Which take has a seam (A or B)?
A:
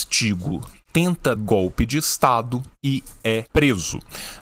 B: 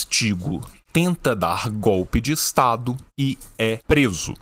A